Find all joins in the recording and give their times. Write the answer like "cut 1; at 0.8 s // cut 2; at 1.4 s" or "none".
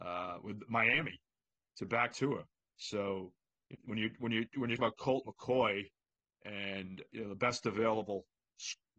cut 1; at 2.1 s // cut 2; at 3.7 s // cut 3; at 4.8 s // cut 4; at 7.1 s